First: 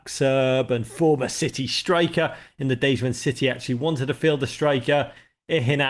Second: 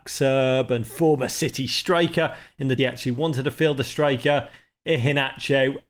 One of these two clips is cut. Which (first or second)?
second